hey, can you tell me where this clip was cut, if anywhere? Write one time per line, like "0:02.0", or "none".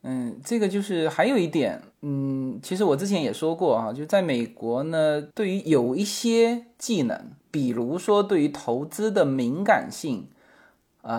0:01.9
0:05.3
0:07.4